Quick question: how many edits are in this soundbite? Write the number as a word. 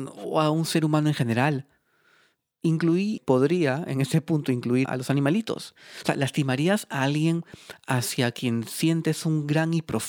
two